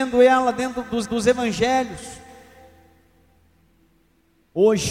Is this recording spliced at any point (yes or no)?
yes